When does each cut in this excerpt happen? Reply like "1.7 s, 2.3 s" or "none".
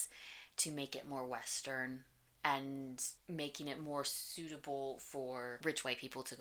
none